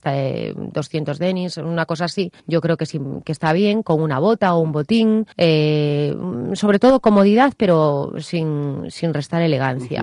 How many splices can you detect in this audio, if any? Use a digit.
2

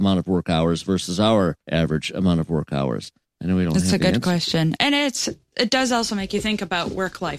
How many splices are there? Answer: 2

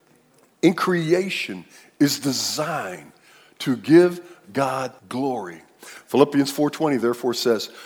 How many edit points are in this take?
1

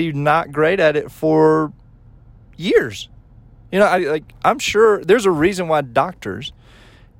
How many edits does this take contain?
0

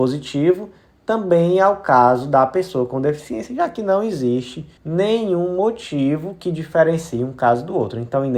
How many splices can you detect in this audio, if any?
1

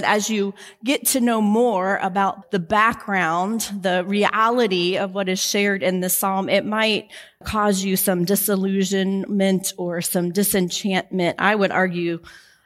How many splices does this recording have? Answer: 2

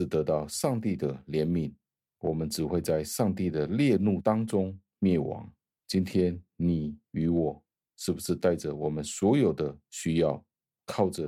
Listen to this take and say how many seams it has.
0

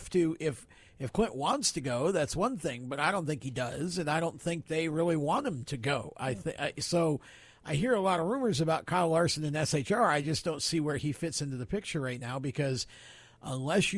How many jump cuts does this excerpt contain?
0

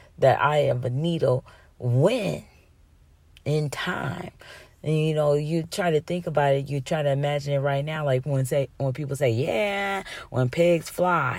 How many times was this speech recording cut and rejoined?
0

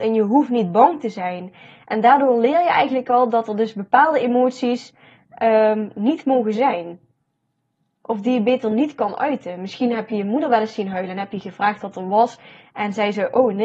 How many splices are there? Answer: 0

